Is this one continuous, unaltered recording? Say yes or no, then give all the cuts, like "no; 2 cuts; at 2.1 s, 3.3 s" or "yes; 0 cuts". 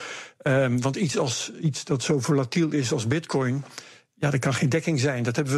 yes; 0 cuts